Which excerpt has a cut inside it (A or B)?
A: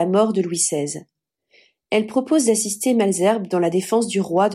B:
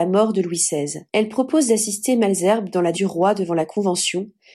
B